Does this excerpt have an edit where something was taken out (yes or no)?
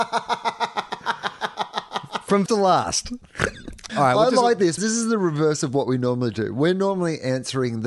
yes